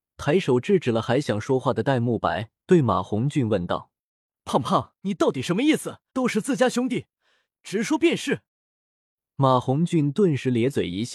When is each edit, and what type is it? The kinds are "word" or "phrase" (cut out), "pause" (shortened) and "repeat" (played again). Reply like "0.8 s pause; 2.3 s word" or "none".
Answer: 2.6 s pause; 5.0 s pause; 6.1 s pause; 8.5 s pause